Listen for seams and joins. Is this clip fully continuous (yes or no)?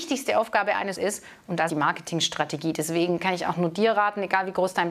no